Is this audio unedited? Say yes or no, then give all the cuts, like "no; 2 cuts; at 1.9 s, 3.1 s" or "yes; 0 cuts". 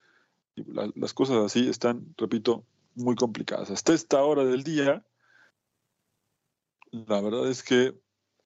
yes; 0 cuts